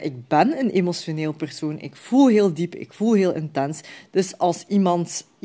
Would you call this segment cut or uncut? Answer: uncut